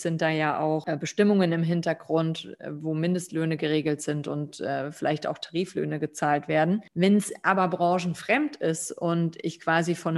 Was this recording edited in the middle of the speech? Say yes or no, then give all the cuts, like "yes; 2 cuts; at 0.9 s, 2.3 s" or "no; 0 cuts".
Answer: no; 0 cuts